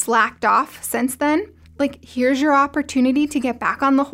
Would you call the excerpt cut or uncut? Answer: cut